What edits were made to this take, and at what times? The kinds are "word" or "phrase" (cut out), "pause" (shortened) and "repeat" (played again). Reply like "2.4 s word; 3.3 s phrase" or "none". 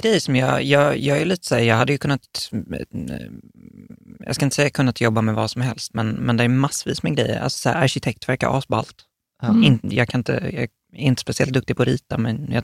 none

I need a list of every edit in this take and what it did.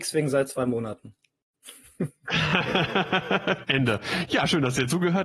3.6 s word

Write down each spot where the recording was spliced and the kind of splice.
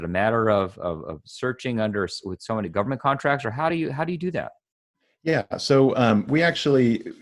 none

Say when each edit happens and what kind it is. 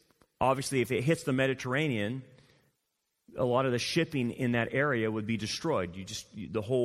none

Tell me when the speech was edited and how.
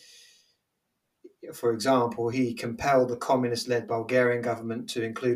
none

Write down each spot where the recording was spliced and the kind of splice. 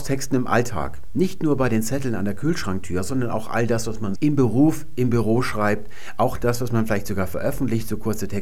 4.2 s word

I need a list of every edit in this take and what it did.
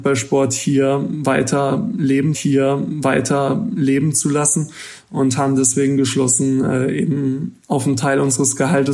2.3 s repeat

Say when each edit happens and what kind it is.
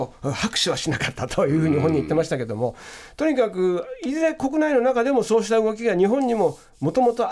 none

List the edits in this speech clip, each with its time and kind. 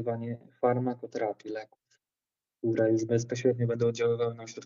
none

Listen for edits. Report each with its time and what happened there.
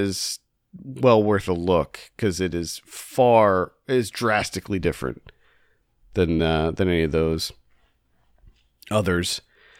none

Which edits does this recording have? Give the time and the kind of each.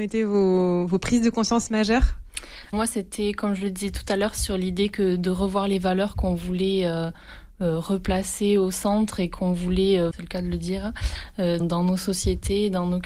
2.7 s word; 10.1 s word; 11.6 s word

